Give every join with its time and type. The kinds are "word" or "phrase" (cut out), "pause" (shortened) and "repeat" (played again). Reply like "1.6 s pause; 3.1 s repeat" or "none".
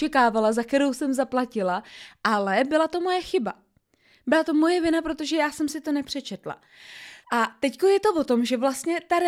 7.2 s pause